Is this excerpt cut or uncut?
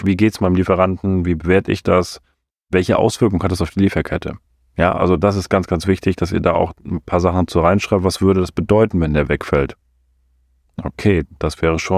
uncut